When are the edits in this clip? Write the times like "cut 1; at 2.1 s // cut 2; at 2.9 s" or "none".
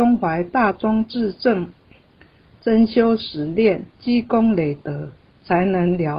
cut 1; at 2.1 s // cut 2; at 3.9 s